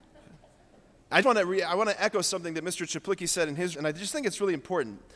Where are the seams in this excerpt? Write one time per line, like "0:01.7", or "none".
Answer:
0:01.2
0:03.7